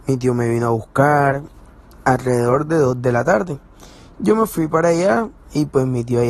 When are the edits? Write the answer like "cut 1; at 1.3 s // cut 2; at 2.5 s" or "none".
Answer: none